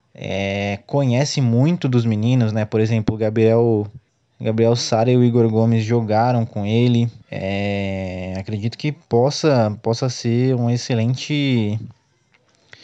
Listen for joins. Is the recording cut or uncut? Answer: cut